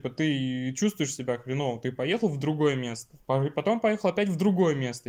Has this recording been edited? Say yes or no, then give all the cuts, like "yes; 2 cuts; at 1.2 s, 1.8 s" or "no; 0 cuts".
yes; 1 cut; at 3.2 s